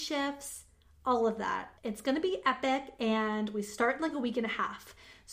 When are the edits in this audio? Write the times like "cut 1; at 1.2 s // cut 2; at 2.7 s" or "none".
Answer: cut 1; at 1.8 s